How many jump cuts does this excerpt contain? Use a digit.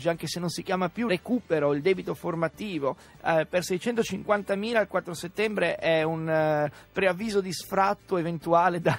1